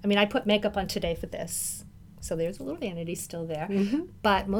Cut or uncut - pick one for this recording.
uncut